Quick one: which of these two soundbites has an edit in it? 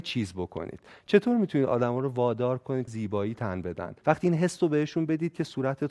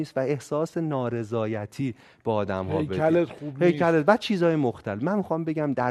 first; 2 cuts; at 2.9 s, 4.0 s

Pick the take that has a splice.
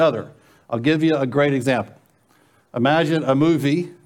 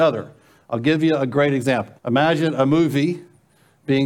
second; 1 cut; at 2.0 s

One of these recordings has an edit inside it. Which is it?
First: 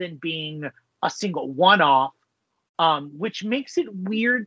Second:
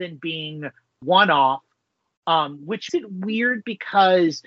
second; 2 cuts; at 1.0 s, 2.9 s

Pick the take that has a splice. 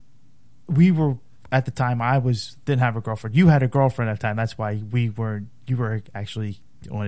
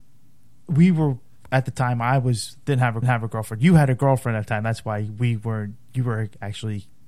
second; 1 cut; at 3.0 s

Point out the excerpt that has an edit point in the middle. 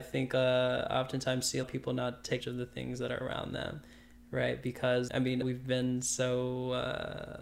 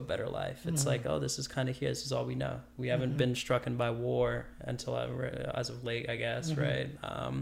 first; 4 cuts; at 1.6 s, 2.4 s, 5.1 s, 5.4 s

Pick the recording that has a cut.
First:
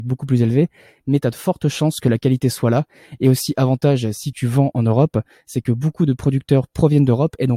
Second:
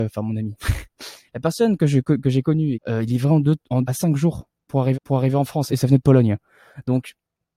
second; 4 cuts; at 2.7 s, 3.8 s, 4.9 s, 5.7 s

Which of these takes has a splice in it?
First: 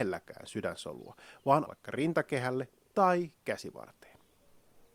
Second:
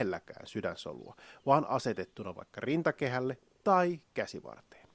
first; 1 cut; at 1.6 s

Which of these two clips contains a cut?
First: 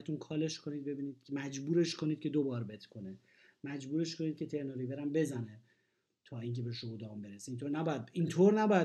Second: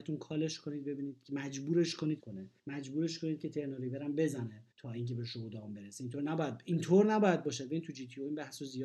second; 3 cuts; at 2.2 s, 2.6 s, 4.7 s

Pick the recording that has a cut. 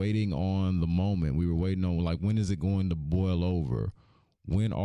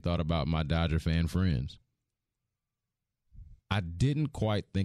second; 1 cut; at 3.6 s

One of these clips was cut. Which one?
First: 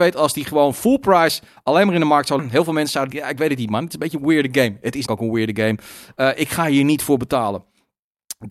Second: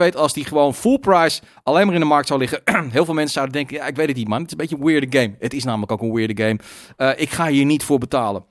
first; 3 cuts; at 2.4 s, 3.1 s, 5.1 s

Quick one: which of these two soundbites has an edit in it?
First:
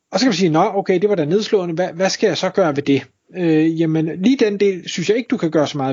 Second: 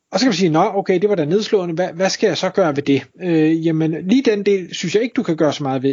second; 1 cut; at 3.1 s

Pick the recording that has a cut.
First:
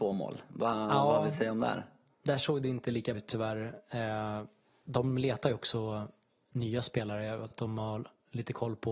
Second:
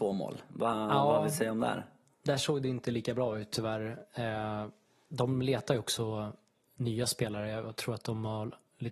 first; 2 cuts; at 3.1 s, 7.5 s

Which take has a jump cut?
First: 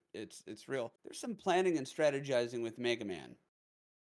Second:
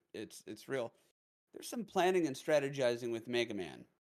first; 1 cut; at 1.0 s

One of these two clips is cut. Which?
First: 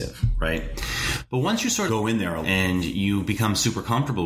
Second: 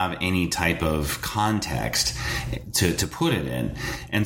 first; 2 cuts; at 1.9 s, 2.4 s

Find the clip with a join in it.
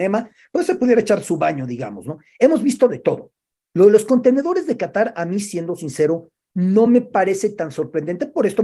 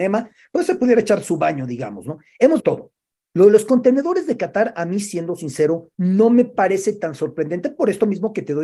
second; 2 cuts; at 2.6 s, 5.9 s

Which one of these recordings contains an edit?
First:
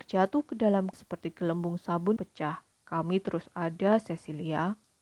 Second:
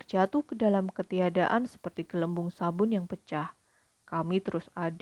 first; 3 cuts; at 0.9 s, 2.2 s, 2.7 s

